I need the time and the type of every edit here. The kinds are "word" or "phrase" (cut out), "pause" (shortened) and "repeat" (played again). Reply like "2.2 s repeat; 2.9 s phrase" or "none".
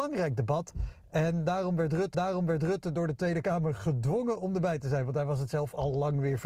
2.1 s repeat